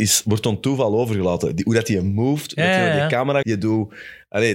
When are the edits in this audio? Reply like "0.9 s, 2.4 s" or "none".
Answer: 3.4 s